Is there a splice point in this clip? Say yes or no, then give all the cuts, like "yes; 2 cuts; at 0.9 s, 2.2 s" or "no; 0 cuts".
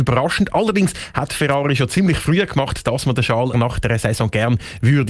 yes; 2 cuts; at 2.5 s, 3.5 s